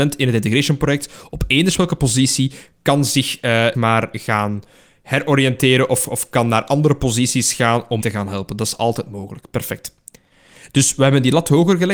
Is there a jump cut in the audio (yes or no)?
yes